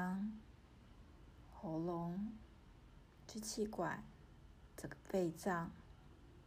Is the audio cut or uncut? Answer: uncut